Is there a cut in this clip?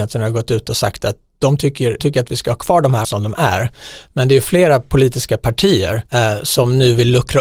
yes; 3 cuts; at 2.0 s, 3.0 s, 6.1 s

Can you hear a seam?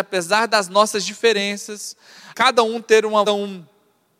yes; 2 cuts; at 2.3 s, 3.3 s

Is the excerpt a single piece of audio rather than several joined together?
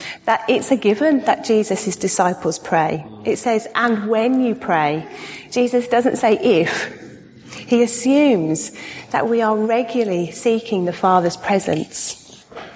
yes; 0 cuts

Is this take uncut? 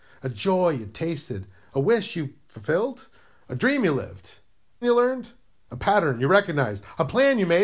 no; 1 cut; at 4.8 s

